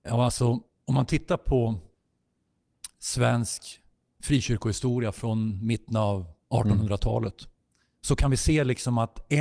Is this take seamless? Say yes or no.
no